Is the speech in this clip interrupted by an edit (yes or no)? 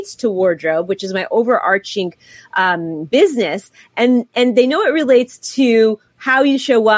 no